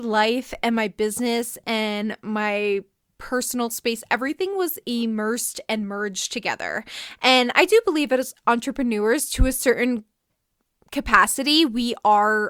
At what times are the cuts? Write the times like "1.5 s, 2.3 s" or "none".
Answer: none